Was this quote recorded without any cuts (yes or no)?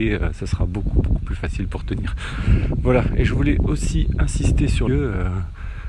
no